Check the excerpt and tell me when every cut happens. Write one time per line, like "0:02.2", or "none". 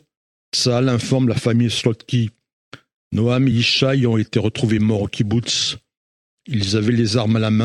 none